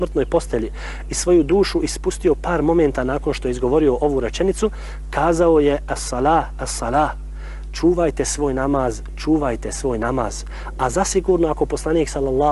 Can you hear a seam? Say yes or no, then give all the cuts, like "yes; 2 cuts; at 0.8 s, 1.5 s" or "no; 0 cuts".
no; 0 cuts